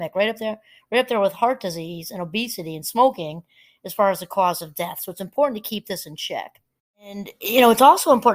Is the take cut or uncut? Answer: uncut